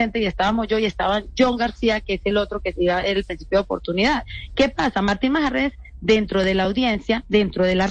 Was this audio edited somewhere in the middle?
no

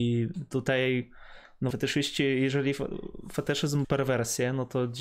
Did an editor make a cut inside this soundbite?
yes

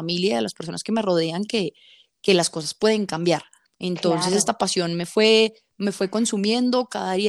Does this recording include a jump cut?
no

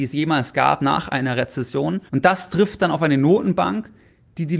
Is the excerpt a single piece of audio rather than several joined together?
no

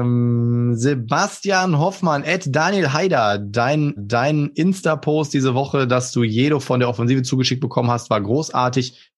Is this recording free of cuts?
no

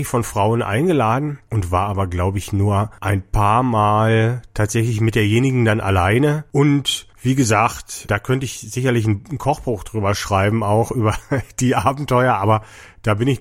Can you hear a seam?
no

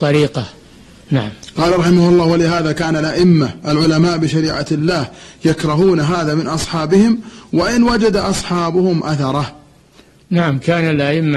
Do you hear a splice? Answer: no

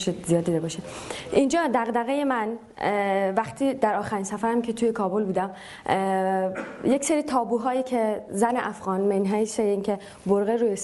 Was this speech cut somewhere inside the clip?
no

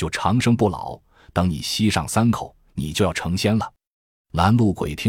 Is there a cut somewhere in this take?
no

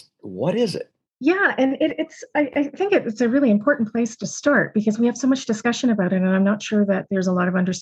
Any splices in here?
no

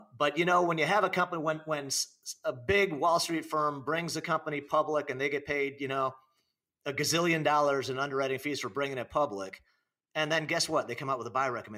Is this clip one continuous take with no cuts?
yes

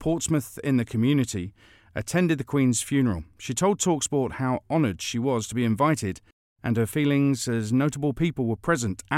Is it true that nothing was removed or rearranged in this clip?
yes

